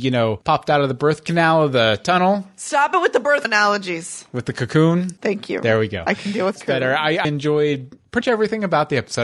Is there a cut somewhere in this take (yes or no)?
yes